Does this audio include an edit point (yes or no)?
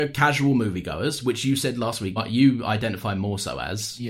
yes